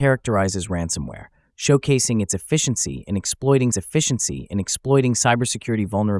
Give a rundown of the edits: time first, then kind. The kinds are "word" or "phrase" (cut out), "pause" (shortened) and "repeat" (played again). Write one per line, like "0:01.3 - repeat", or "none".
0:03.7 - repeat